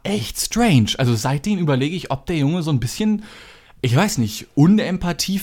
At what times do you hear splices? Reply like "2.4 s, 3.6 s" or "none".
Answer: none